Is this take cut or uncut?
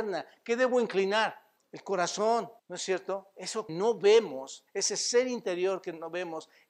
cut